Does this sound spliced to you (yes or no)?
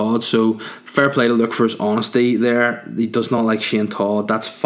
no